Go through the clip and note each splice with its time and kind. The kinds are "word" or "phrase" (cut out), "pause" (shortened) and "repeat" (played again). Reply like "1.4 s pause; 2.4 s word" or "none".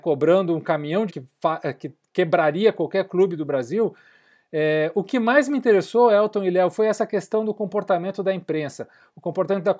1.1 s phrase